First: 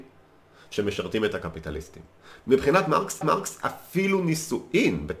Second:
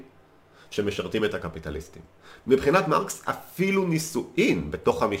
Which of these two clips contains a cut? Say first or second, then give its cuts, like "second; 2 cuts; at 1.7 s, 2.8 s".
first; 1 cut; at 3.2 s